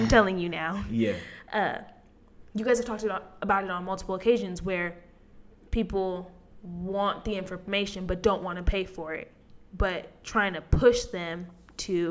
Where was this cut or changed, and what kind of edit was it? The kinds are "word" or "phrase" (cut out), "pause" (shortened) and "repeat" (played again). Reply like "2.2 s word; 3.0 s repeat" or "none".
5.5 s pause